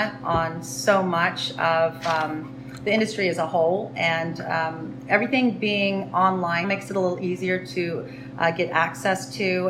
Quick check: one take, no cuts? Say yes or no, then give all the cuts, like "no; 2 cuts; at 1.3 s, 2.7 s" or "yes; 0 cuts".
no; 1 cut; at 6.6 s